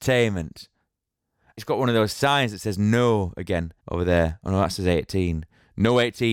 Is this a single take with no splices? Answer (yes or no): no